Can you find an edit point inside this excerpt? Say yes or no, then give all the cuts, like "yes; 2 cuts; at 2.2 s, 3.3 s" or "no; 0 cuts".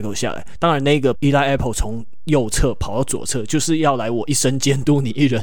yes; 1 cut; at 1.1 s